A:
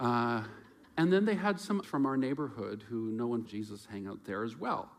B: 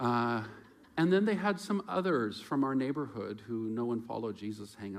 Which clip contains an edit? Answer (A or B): A